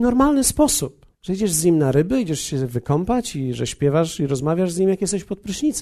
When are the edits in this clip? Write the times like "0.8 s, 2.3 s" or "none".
1.1 s